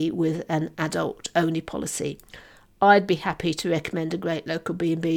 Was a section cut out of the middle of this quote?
no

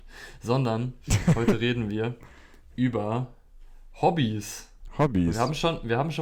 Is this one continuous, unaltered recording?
yes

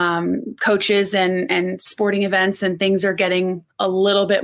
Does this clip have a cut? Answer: no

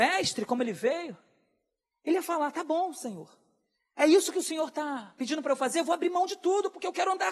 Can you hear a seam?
no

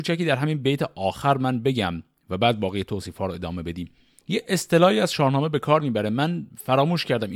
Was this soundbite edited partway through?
no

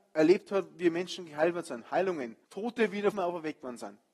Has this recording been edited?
yes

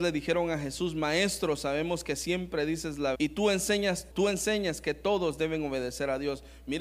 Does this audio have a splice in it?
yes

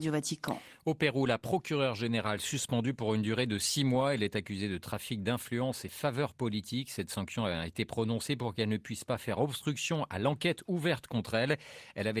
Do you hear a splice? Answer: no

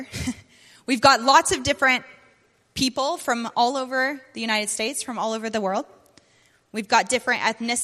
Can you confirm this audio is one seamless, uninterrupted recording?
yes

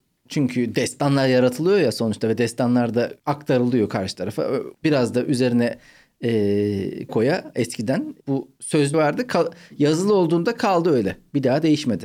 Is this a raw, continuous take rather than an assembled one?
no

